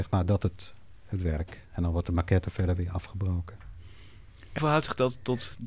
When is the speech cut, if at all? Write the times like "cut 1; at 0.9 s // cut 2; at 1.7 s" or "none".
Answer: cut 1; at 4.6 s

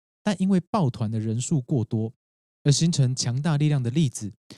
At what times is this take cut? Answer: none

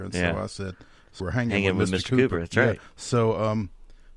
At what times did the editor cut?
cut 1; at 1.2 s

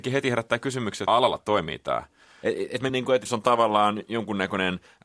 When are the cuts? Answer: cut 1; at 1.1 s // cut 2; at 1.4 s // cut 3; at 2.9 s // cut 4; at 3.3 s

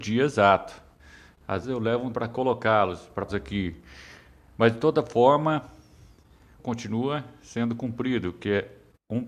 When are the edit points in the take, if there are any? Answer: cut 1; at 1.6 s // cut 2; at 2.1 s // cut 3; at 3.3 s // cut 4; at 6.6 s

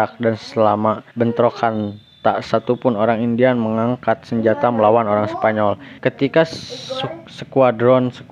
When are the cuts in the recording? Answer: cut 1; at 1.1 s // cut 2; at 6.0 s

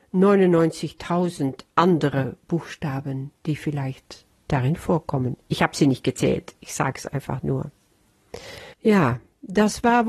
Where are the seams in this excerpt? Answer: cut 1; at 3.4 s // cut 2; at 8.7 s

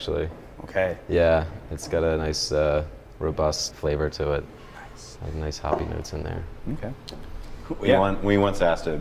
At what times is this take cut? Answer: cut 1; at 3.7 s

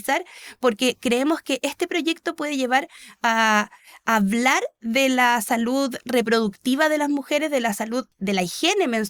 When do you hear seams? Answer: none

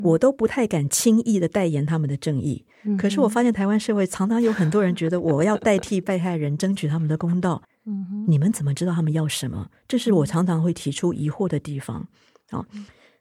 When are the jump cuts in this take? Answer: cut 1; at 2.7 s // cut 2; at 7.6 s

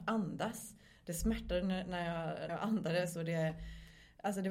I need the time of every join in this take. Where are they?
cut 1; at 2.5 s

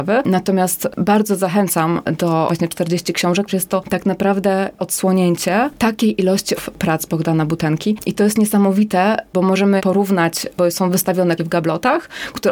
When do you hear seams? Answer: cut 1; at 2.5 s // cut 2; at 3.5 s // cut 3; at 4.8 s // cut 4; at 6.6 s // cut 5; at 9.8 s // cut 6; at 11.4 s

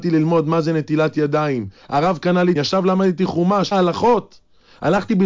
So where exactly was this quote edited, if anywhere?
cut 1; at 2.6 s // cut 2; at 3.7 s

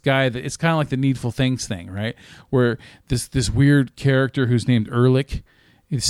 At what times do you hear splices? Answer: none

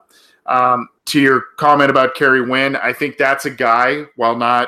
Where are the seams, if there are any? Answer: cut 1; at 1.0 s

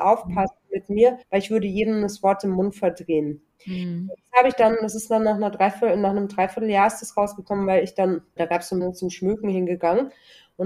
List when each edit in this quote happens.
cut 1; at 1.2 s // cut 2; at 8.4 s // cut 3; at 8.8 s

